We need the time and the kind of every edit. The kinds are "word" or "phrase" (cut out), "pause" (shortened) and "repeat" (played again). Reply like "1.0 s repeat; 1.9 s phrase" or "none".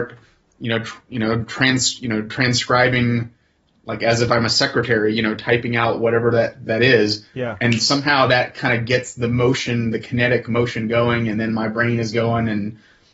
none